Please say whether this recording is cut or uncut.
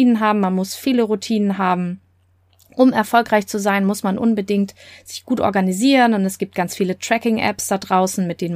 uncut